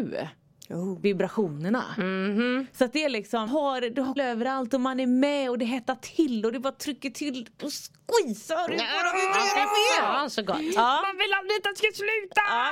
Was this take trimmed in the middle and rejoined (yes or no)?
yes